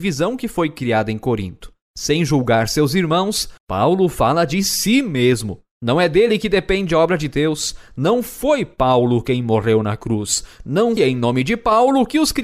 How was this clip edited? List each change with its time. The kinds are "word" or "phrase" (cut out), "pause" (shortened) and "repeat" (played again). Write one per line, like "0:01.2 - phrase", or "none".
0:03.6 - pause
0:11.0 - word

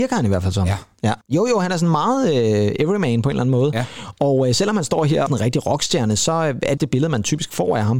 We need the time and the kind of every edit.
0:01.2 - pause
0:05.3 - phrase
0:06.8 - phrase

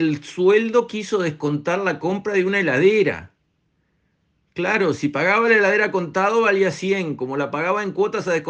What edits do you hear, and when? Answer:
none

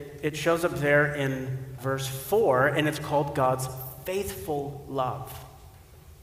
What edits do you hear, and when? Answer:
0:01.8 - word

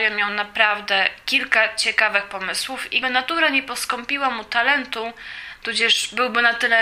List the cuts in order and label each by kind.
0:03.0 - word

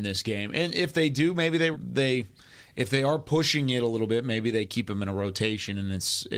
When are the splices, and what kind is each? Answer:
0:01.7 - word

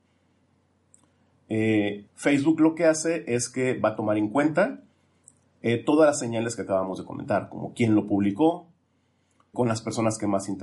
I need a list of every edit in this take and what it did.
0:02.1 - pause
0:09.5 - word

